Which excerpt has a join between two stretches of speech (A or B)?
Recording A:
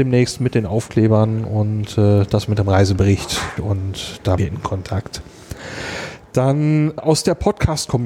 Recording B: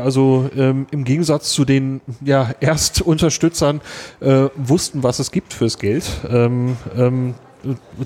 A